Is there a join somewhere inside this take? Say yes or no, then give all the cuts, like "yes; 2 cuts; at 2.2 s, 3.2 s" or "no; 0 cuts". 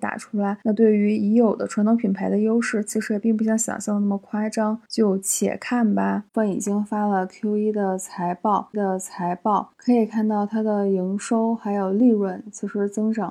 yes; 1 cut; at 8.7 s